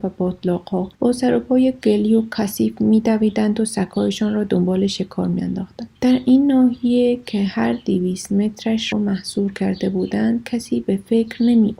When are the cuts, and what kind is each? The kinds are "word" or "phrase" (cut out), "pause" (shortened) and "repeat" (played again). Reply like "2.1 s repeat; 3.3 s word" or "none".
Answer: 0.9 s pause; 6.0 s pause; 8.9 s phrase